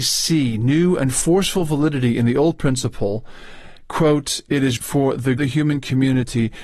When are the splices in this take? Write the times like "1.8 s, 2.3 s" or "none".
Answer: 4.8 s, 5.4 s